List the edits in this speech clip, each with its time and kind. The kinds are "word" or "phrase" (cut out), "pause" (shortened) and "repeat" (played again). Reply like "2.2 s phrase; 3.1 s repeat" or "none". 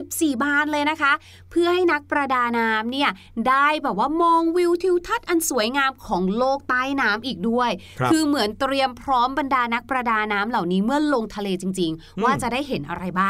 none